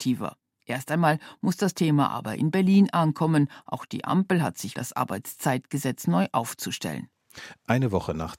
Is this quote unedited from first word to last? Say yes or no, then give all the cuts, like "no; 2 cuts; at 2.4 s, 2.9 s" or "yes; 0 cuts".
no; 1 cut; at 4.7 s